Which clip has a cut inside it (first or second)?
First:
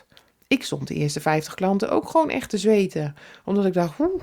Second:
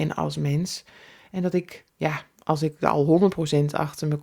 second